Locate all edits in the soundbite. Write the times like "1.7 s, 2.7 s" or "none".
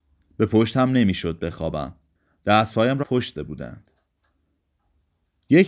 2.1 s, 3.0 s, 3.3 s